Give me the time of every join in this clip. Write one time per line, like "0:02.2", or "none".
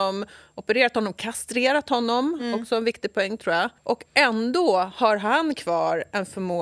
0:03.8

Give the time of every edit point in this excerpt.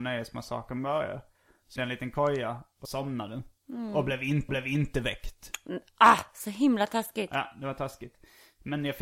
0:01.8
0:02.8
0:04.5

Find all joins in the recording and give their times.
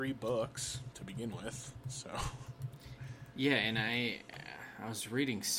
none

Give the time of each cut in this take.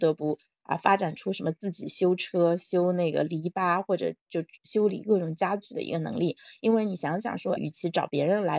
0:07.6

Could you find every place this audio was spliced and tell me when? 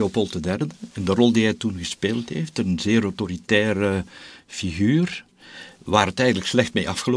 none

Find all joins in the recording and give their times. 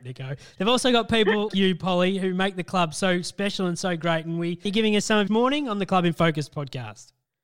0:01.5
0:04.7
0:05.3

